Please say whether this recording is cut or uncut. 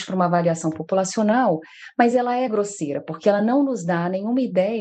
uncut